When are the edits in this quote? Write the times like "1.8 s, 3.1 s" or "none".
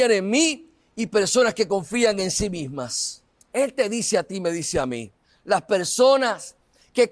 3.3 s, 5.2 s